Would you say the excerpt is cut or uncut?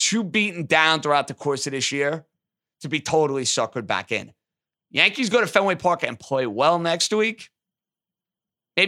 uncut